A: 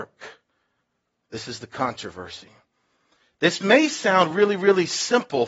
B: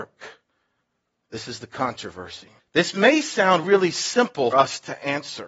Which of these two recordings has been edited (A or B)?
B